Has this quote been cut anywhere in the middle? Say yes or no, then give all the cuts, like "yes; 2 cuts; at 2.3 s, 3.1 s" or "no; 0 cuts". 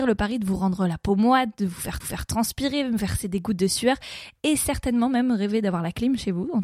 yes; 1 cut; at 2.0 s